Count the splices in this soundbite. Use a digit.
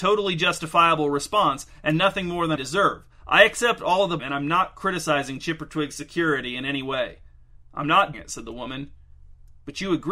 3